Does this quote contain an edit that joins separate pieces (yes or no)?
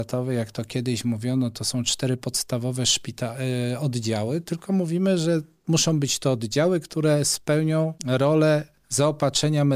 yes